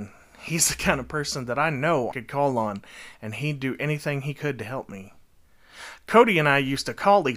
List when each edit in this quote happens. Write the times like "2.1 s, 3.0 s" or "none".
2.1 s